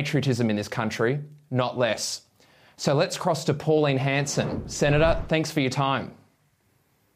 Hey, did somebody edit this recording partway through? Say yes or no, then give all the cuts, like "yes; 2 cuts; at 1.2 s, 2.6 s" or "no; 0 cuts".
no; 0 cuts